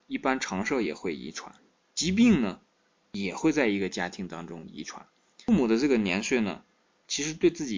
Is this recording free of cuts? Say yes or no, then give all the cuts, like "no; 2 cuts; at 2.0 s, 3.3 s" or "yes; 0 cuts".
yes; 0 cuts